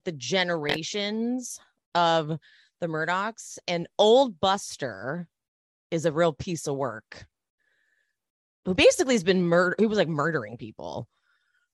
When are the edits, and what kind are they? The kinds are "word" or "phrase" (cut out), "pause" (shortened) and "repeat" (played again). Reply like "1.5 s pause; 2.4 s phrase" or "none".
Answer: none

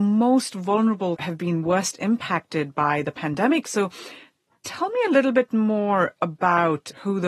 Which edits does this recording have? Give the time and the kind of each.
1.2 s word

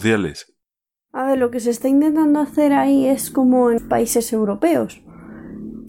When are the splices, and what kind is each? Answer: 3.8 s word

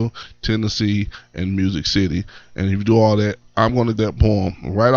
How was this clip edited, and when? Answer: 4.0 s word

